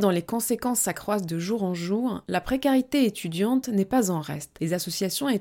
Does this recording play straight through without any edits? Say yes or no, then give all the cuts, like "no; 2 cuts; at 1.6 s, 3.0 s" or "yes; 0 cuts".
yes; 0 cuts